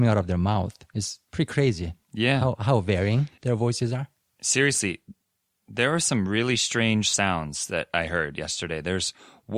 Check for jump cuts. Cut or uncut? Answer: uncut